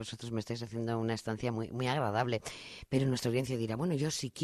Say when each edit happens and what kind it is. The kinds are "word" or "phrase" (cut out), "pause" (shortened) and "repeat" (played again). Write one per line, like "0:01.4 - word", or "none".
none